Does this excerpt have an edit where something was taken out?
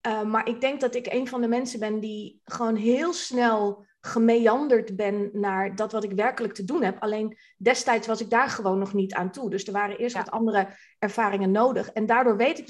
no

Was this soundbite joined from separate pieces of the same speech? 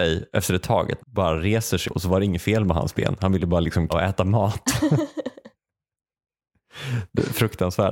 yes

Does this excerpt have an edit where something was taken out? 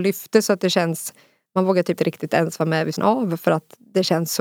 yes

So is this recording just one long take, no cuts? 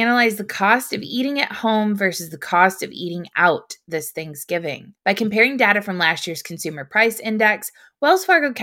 no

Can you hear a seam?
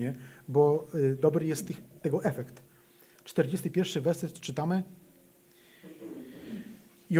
no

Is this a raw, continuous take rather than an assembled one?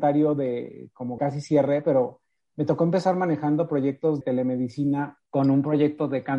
no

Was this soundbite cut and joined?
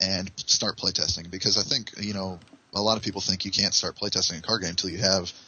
no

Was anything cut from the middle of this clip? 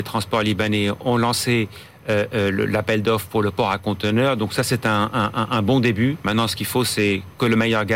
no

